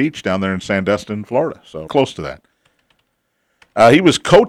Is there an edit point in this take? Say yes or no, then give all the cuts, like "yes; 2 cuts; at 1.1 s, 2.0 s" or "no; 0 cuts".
yes; 1 cut; at 1.9 s